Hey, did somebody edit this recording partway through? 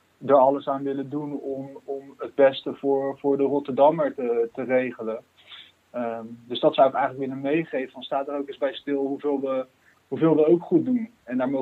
no; 0 cuts

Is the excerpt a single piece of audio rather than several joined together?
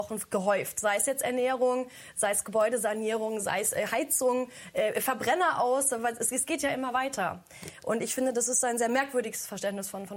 yes; 0 cuts

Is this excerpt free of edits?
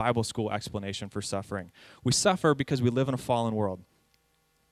yes; 0 cuts

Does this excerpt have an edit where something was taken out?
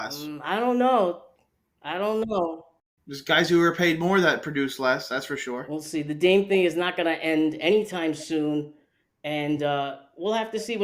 no; 0 cuts

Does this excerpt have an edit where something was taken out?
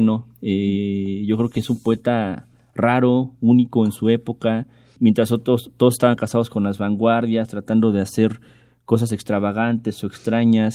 no; 0 cuts

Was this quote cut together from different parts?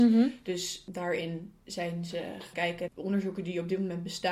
yes; 2 cuts; at 2.5 s, 2.9 s

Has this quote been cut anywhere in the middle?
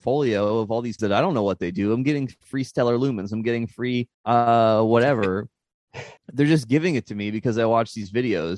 yes; 3 cuts; at 1.0 s, 4.1 s, 6.2 s

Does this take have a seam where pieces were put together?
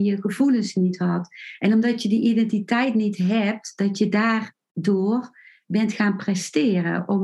no; 0 cuts

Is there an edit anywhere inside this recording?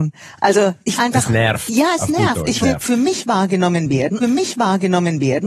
yes; 3 cuts; at 1.0 s, 2.6 s, 4.2 s

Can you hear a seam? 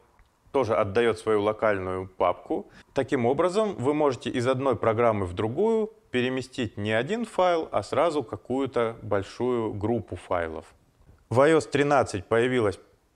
no; 0 cuts

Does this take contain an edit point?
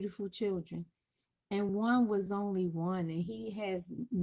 no; 0 cuts

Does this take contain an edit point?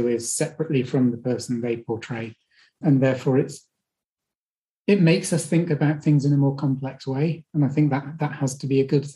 no; 0 cuts

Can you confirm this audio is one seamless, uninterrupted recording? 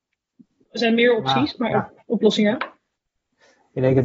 yes; 0 cuts

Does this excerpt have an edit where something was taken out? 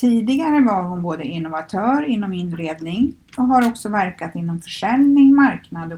no; 0 cuts

